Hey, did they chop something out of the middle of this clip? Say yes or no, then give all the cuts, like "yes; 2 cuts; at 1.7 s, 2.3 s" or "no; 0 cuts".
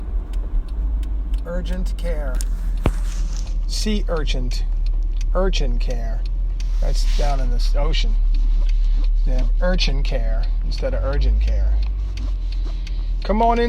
no; 0 cuts